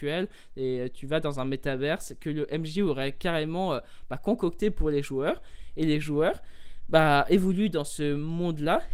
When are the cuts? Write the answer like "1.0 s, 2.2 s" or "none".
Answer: none